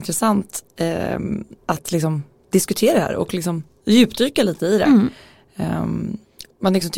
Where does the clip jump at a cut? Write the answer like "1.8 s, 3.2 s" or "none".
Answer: 1.6 s